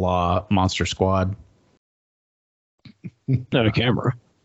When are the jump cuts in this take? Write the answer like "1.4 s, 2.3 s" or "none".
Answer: 3.5 s